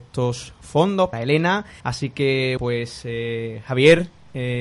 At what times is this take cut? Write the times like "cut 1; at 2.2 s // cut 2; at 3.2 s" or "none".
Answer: cut 1; at 1.1 s // cut 2; at 1.8 s // cut 3; at 2.6 s